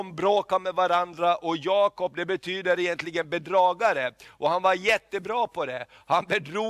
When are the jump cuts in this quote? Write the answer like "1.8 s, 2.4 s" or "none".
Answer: none

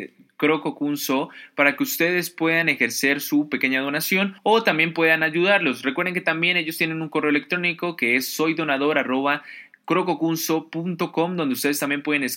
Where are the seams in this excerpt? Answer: 4.4 s

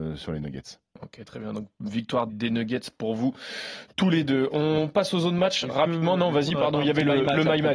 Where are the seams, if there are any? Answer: 2.3 s, 3.9 s

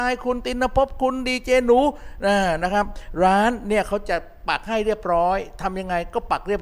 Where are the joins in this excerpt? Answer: none

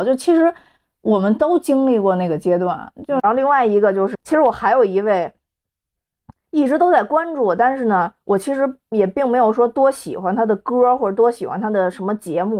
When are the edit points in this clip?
4.1 s

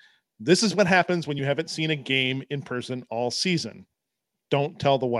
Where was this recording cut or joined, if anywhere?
none

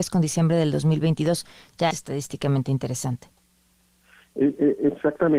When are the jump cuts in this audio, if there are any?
1.9 s

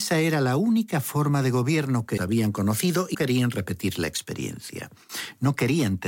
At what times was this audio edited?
2.2 s, 3.1 s

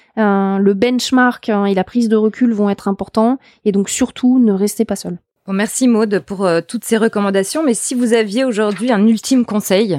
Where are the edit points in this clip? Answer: none

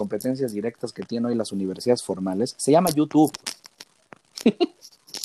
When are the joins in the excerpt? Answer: none

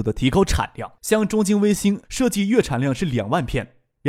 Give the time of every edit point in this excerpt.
1.0 s, 2.0 s

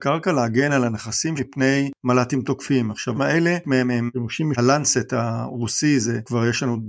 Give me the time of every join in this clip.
1.4 s, 3.1 s, 3.6 s, 4.5 s

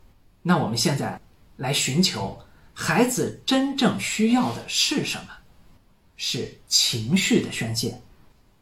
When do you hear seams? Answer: none

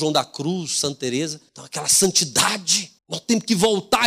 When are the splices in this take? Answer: 1.5 s, 3.0 s

